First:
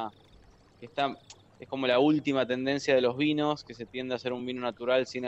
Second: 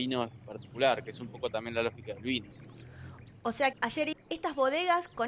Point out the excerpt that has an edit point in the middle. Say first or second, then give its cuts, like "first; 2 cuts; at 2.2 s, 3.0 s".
second; 3 cuts; at 2.5 s, 3.7 s, 4.1 s